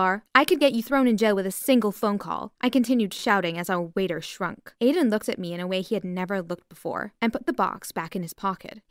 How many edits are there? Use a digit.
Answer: 0